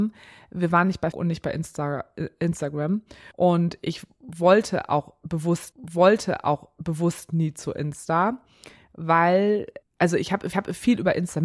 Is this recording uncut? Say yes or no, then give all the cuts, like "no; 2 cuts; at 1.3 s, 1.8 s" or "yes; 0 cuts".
no; 5 cuts; at 1.1 s, 3.3 s, 5.7 s, 9.8 s, 10.5 s